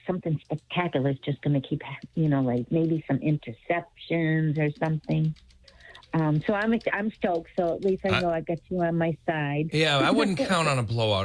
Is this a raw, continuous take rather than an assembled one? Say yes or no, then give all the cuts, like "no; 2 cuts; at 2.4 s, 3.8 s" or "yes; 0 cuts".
yes; 0 cuts